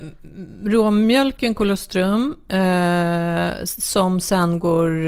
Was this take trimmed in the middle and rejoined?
no; 0 cuts

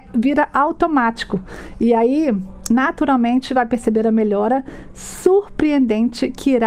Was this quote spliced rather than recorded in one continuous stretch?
no; 0 cuts

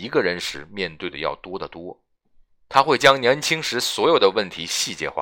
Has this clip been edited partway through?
no; 0 cuts

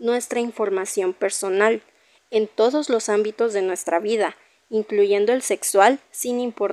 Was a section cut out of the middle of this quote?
no; 0 cuts

